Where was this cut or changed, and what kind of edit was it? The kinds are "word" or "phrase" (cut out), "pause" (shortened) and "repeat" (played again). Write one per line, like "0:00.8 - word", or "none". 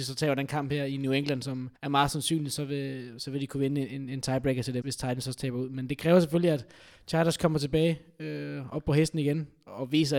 0:01.8 - pause
0:04.8 - word